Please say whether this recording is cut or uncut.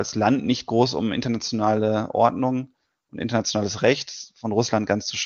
uncut